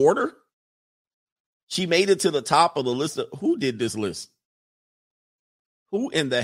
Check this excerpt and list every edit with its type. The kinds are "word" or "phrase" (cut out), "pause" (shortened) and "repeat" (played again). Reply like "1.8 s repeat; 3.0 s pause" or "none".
none